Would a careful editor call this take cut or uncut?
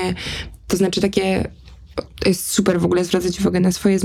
uncut